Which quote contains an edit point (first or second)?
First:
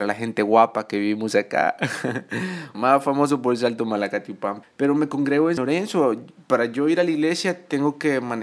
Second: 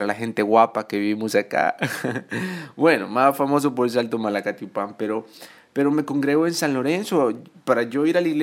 first